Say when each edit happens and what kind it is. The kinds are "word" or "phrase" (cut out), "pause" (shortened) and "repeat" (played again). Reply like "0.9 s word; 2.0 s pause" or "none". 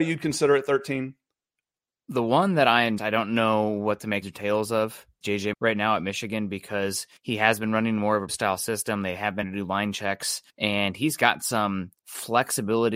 3.0 s word; 4.2 s word; 5.2 s word; 5.5 s word; 7.2 s pause; 8.3 s word; 9.4 s word; 10.5 s pause; 12.0 s pause